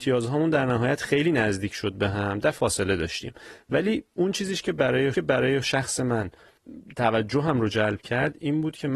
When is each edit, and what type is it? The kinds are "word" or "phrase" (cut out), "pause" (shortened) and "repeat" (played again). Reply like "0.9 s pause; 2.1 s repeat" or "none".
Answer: 2.6 s word; 5.1 s repeat